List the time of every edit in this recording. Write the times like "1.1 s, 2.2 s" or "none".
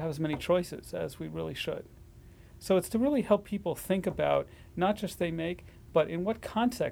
5.2 s